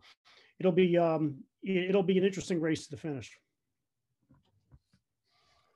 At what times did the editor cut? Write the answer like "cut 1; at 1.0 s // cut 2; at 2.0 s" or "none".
none